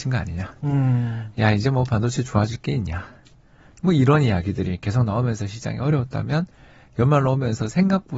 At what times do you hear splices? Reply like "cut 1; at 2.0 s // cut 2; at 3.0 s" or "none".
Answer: none